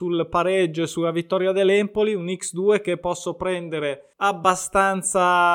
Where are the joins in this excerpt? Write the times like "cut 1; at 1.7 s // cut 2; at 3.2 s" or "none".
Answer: cut 1; at 4.1 s

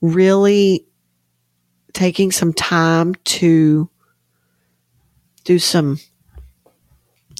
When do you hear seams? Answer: none

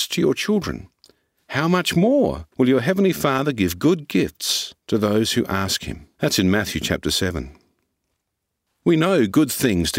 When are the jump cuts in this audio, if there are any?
cut 1; at 2.5 s // cut 2; at 4.8 s // cut 3; at 6.1 s

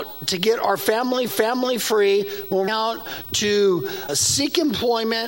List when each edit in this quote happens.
cut 1; at 1.3 s // cut 2; at 2.7 s // cut 3; at 4.1 s

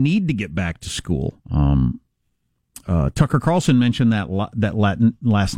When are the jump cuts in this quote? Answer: cut 1; at 1.4 s

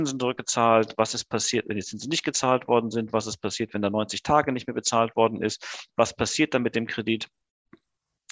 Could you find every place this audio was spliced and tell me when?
none

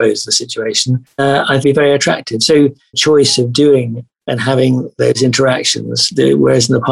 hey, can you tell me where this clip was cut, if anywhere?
cut 1; at 1.2 s // cut 2; at 1.6 s // cut 3; at 2.9 s

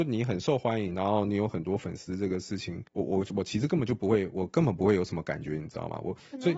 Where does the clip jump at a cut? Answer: cut 1; at 2.9 s

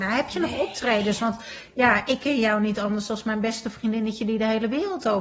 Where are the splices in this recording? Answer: none

